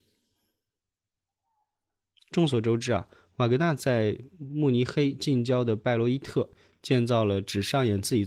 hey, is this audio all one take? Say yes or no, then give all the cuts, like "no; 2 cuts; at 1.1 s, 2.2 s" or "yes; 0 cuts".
yes; 0 cuts